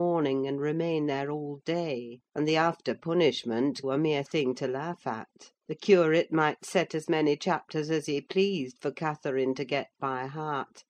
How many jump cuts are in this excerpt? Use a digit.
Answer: 3